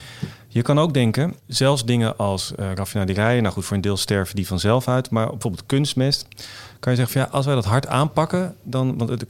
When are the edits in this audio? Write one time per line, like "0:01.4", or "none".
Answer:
0:01.4